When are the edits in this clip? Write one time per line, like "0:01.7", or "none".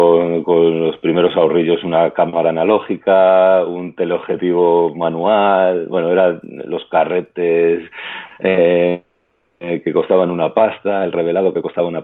none